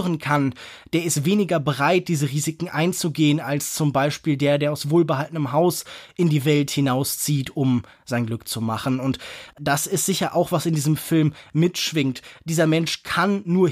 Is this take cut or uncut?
uncut